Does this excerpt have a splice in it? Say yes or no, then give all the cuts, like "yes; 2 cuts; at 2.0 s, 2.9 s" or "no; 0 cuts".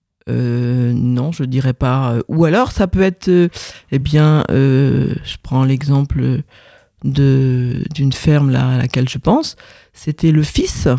no; 0 cuts